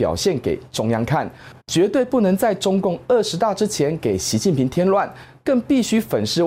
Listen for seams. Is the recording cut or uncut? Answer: cut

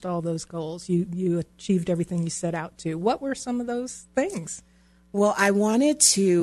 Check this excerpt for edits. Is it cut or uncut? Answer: uncut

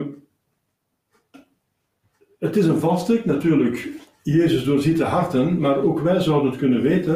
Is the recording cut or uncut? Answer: uncut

